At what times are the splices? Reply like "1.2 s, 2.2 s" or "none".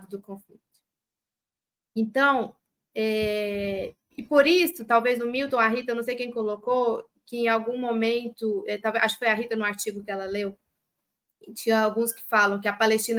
none